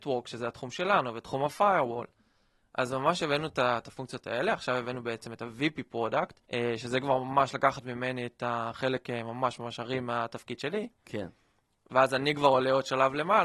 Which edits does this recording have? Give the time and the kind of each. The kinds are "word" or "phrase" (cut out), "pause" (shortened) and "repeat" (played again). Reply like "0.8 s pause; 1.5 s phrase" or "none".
6.4 s pause